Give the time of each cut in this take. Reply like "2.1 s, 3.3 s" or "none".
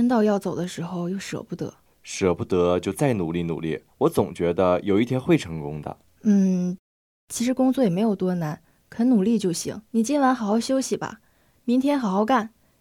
1.9 s, 3.9 s, 6.0 s, 9.9 s